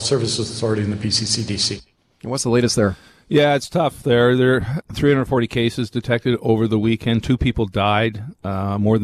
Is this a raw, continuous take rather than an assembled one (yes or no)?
no